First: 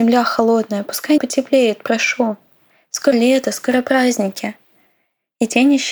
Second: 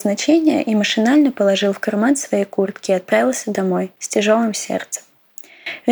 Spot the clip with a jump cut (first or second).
first